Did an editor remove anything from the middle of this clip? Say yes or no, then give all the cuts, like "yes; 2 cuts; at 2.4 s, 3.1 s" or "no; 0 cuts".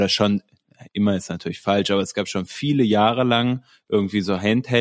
no; 0 cuts